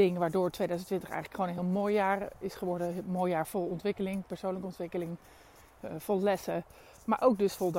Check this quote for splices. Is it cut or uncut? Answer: uncut